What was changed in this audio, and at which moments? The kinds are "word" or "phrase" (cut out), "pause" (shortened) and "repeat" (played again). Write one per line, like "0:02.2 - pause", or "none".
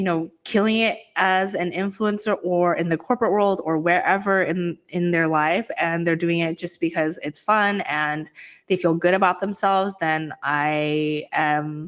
none